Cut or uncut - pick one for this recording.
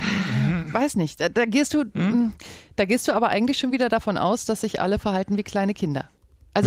uncut